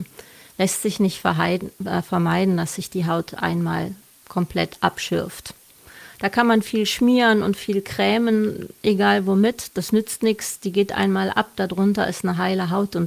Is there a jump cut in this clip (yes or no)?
no